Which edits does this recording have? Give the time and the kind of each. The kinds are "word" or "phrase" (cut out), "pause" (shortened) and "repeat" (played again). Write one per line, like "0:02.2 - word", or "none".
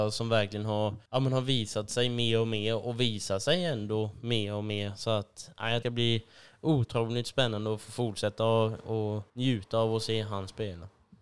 0:01.0 - pause
0:05.8 - phrase
0:09.3 - pause